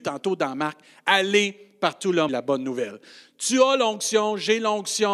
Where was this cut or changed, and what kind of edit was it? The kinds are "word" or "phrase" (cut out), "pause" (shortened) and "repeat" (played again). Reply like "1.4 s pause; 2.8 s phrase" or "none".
2.3 s phrase